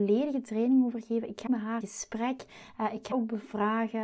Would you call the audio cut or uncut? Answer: cut